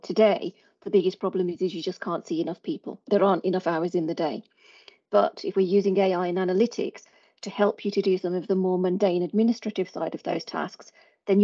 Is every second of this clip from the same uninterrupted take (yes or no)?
yes